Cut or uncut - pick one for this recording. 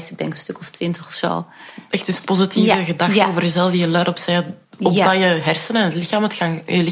uncut